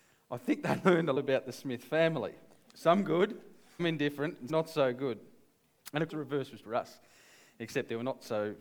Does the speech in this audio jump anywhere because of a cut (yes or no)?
yes